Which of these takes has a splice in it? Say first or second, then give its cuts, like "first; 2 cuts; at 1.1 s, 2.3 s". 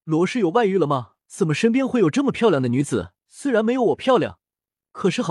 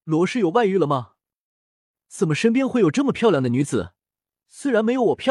first; 2 cuts; at 1.2 s, 3.2 s